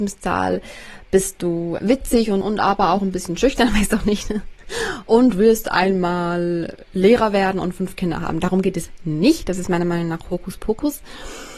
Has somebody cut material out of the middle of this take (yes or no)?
yes